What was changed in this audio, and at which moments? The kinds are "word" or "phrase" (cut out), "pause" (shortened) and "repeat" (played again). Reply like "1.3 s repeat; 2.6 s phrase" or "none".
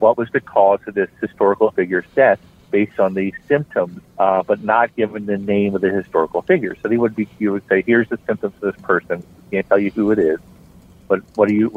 4.1 s pause